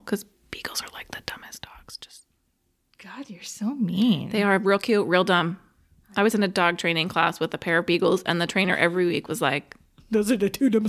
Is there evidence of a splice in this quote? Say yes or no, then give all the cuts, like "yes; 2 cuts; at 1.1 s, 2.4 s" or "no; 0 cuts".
no; 0 cuts